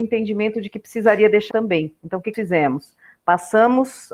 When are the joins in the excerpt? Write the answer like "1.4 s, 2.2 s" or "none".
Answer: 1.5 s, 2.3 s